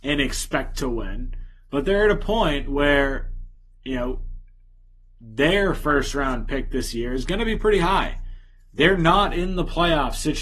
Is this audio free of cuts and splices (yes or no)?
yes